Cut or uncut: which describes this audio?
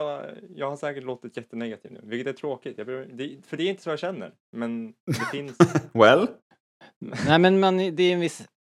uncut